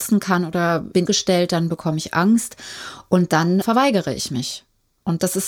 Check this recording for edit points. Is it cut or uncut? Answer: cut